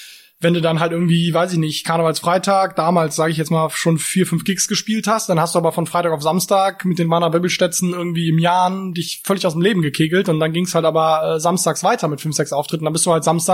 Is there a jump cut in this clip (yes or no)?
no